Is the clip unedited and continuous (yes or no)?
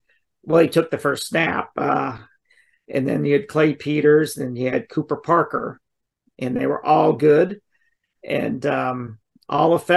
yes